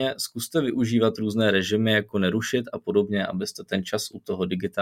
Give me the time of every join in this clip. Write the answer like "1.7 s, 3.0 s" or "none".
none